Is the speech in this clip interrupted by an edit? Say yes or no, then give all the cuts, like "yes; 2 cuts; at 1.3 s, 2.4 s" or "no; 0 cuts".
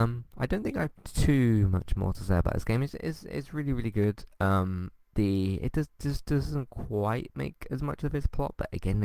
yes; 2 cuts; at 5.1 s, 8.0 s